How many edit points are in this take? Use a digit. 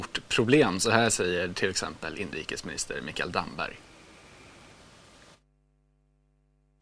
0